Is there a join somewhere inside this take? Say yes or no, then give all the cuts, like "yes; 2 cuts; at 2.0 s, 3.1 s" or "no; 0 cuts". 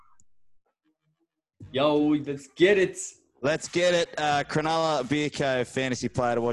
no; 0 cuts